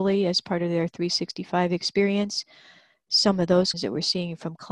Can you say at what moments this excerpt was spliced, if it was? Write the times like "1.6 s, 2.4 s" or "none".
3.7 s